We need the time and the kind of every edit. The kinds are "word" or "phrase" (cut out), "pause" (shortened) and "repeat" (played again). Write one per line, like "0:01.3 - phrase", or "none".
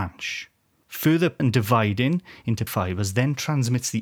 0:01.4 - word
0:02.7 - word